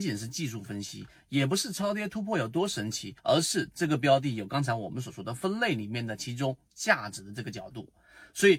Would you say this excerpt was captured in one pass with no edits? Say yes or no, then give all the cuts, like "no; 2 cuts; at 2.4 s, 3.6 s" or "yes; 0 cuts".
no; 1 cut; at 3.2 s